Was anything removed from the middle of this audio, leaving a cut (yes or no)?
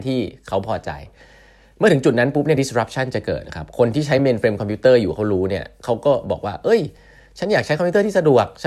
no